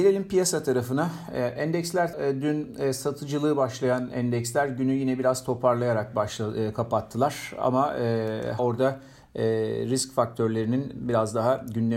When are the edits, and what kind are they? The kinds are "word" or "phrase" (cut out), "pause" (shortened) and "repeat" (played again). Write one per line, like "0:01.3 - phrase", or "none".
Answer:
0:02.1 - word
0:08.6 - word

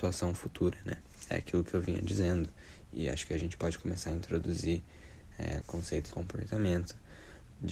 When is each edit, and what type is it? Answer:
0:05.6 - word
0:06.1 - phrase

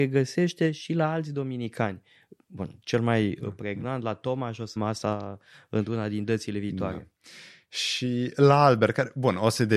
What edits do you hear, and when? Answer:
0:04.8 - word

